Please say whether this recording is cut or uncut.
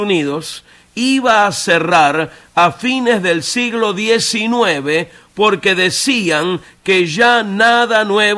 uncut